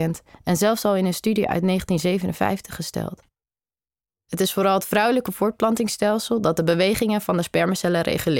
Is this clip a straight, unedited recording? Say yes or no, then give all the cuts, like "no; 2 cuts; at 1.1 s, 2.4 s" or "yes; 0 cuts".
yes; 0 cuts